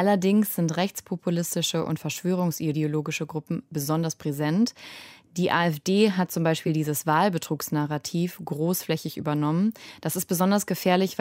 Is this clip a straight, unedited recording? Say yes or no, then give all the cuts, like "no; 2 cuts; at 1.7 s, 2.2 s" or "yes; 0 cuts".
yes; 0 cuts